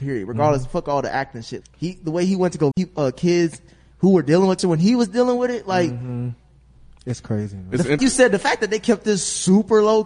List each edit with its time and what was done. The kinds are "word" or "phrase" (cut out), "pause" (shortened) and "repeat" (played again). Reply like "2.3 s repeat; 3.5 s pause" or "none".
1.6 s word; 2.7 s word; 4.6 s word; 8.0 s word